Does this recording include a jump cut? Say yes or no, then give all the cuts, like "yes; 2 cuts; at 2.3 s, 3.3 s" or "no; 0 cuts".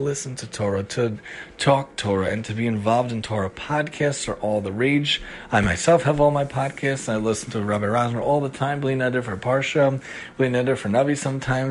no; 0 cuts